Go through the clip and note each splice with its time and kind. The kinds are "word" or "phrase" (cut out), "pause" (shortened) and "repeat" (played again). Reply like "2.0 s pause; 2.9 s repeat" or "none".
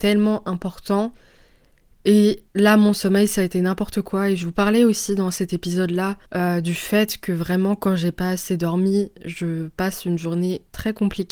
2.5 s pause; 6.3 s pause